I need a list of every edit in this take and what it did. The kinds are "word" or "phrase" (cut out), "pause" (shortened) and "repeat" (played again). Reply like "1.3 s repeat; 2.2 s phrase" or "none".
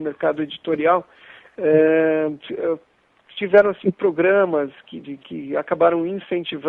5.0 s word